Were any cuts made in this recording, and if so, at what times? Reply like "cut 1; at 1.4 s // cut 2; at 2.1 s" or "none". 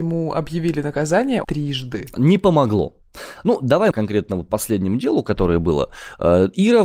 cut 1; at 1.4 s // cut 2; at 3.9 s